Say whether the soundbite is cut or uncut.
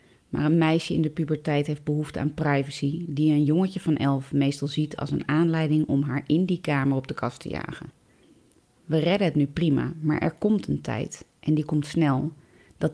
uncut